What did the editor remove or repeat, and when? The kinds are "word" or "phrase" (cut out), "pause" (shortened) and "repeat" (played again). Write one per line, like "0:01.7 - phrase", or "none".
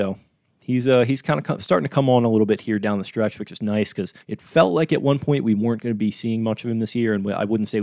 0:04.2 - pause